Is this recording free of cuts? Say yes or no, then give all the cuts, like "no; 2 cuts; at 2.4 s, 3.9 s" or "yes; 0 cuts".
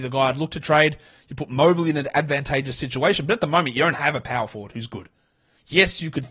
yes; 0 cuts